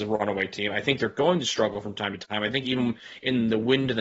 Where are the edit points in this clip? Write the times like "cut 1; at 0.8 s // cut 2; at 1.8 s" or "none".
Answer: none